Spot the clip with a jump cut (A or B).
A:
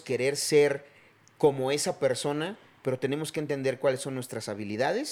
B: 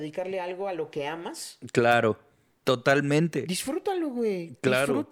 B